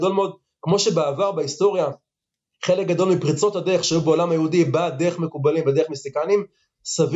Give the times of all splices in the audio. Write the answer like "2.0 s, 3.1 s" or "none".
none